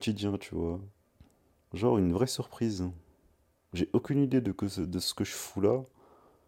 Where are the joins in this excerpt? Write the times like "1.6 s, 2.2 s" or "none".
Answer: none